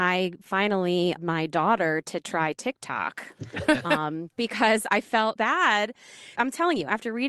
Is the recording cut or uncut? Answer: cut